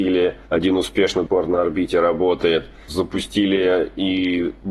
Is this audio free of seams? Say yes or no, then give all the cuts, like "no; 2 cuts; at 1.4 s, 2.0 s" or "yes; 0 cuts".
no; 1 cut; at 1.3 s